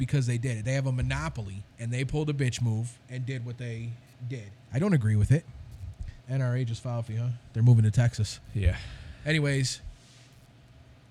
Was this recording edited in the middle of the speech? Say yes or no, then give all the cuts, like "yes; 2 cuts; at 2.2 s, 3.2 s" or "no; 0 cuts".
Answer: yes; 5 cuts; at 1.7 s, 3.0 s, 4.6 s, 6.2 s, 7.1 s